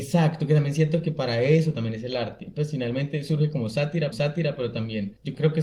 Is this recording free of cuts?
no; 1 cut; at 4.1 s

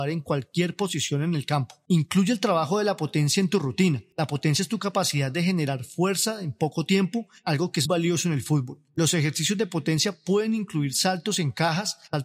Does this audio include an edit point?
yes; 1 cut; at 7.8 s

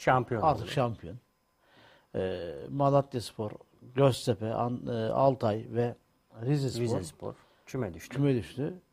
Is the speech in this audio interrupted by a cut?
no; 0 cuts

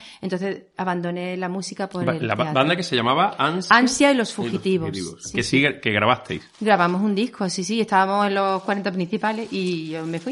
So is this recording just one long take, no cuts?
yes; 0 cuts

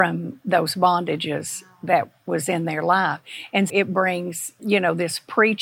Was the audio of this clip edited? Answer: yes; 2 cuts; at 3.7 s, 4.6 s

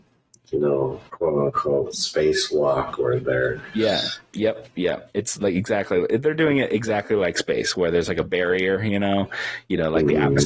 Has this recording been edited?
yes; 1 cut; at 1.1 s

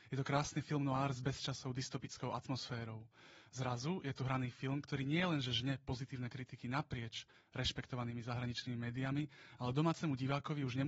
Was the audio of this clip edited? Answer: no; 0 cuts

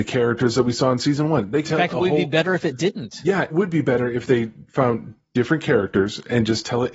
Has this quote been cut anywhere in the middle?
yes; 2 cuts; at 1.7 s, 3.5 s

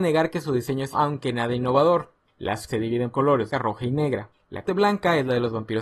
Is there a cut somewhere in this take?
yes; 5 cuts; at 0.9 s, 2.7 s, 3.1 s, 3.5 s, 4.6 s

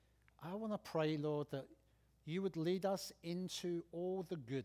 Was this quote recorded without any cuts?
yes; 0 cuts

